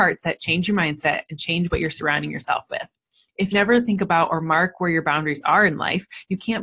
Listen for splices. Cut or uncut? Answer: cut